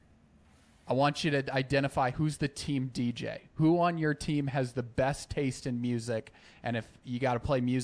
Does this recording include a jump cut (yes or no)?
no